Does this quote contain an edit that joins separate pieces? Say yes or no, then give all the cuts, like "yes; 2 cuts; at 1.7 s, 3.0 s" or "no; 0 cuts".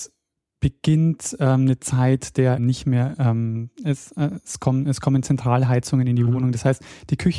yes; 1 cut; at 2.6 s